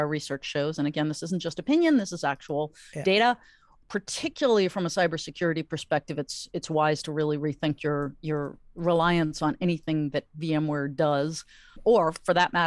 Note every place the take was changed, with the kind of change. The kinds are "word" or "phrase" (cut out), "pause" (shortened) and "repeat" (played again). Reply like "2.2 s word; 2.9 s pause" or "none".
none